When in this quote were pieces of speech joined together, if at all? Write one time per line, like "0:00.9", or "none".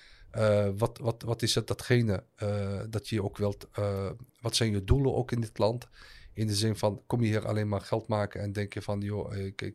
0:04.3